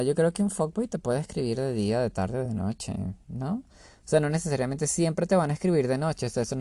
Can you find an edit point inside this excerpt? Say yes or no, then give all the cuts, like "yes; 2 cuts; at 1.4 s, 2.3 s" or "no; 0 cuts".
no; 0 cuts